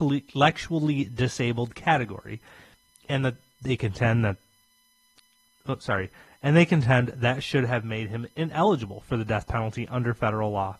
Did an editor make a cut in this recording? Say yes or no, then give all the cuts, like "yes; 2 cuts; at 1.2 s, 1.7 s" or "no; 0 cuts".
no; 0 cuts